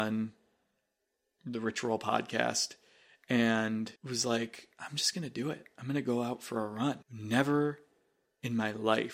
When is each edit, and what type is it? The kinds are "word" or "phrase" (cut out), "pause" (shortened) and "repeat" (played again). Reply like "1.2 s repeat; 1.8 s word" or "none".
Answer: 4.0 s pause; 4.7 s pause; 7.0 s pause